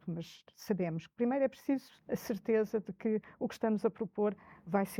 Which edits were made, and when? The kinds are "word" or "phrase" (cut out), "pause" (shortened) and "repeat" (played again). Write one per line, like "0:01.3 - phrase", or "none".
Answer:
0:02.0 - pause